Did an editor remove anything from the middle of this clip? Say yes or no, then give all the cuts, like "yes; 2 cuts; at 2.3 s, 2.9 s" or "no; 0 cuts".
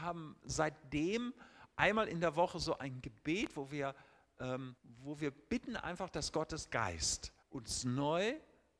yes; 2 cuts; at 4.8 s, 7.4 s